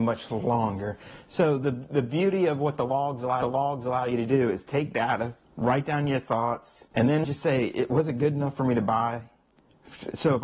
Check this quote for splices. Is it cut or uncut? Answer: cut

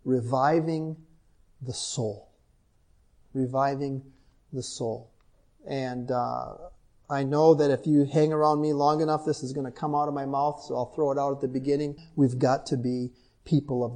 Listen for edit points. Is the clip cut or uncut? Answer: uncut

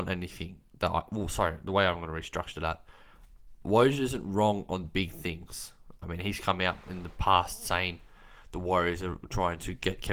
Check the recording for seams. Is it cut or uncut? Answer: uncut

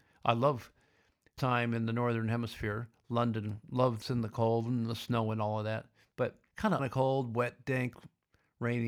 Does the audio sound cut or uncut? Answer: cut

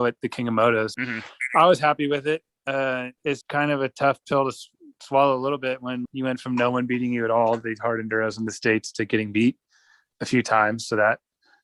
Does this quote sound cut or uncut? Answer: cut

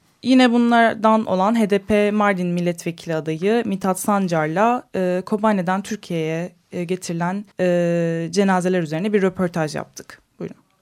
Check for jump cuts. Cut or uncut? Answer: cut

